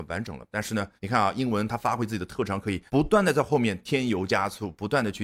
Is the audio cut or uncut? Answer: cut